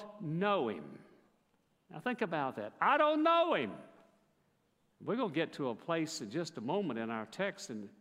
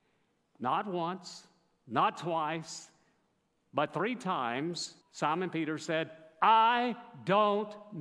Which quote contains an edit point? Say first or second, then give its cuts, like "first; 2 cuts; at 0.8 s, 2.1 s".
second; 1 cut; at 5.0 s